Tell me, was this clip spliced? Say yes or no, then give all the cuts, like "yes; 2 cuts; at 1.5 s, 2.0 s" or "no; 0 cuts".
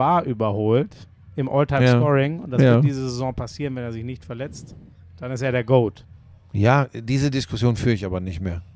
no; 0 cuts